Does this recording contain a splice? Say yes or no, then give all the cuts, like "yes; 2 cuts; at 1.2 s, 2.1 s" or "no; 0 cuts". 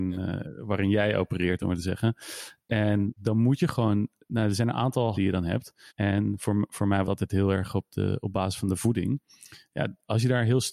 yes; 5 cuts; at 1.6 s, 3.2 s, 5.1 s, 5.9 s, 7.0 s